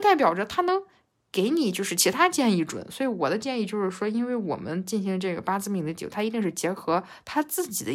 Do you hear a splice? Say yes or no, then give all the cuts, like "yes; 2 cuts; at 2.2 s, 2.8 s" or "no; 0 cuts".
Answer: no; 0 cuts